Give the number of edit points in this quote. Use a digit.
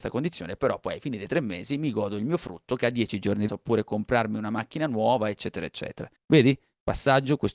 3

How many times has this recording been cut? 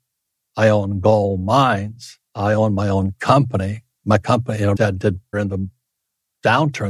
3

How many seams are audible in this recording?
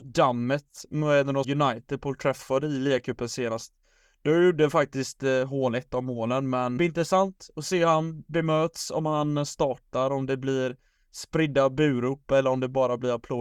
2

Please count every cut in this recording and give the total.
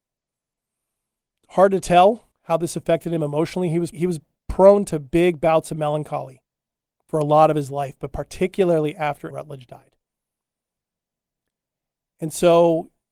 3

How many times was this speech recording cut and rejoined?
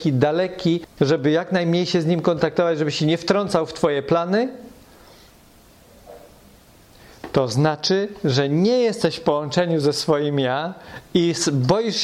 1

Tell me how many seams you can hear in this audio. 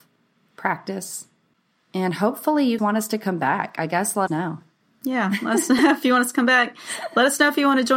2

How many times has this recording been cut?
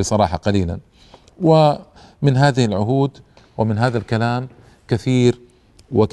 0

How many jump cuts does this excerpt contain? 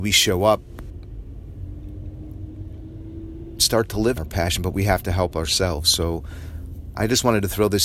2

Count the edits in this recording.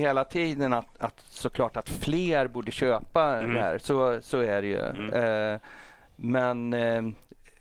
0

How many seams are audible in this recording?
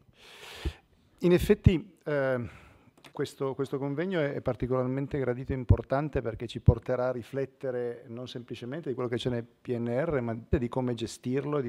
2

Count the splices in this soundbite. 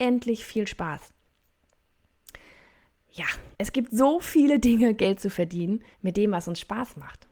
2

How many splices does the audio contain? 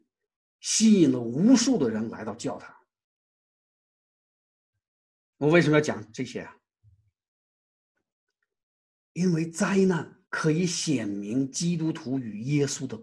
1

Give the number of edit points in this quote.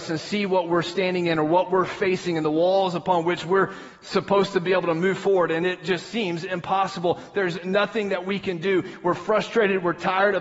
0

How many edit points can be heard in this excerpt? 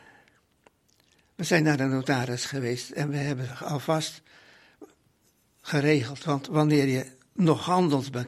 0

